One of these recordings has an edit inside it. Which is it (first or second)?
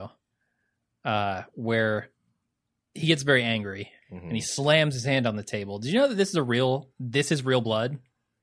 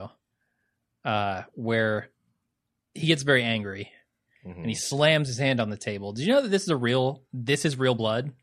first